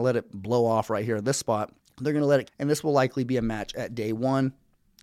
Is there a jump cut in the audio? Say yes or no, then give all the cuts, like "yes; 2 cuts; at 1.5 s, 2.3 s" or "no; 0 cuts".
yes; 2 cuts; at 1.8 s, 2.5 s